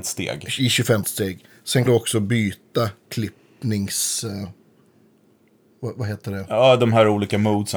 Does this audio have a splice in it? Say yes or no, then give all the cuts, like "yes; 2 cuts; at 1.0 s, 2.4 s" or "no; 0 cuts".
yes; 2 cuts; at 1.0 s, 1.9 s